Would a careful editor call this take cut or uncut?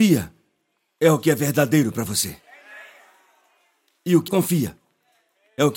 cut